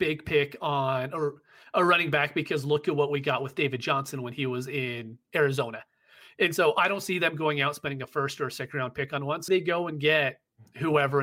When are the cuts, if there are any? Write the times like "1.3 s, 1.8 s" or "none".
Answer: 9.5 s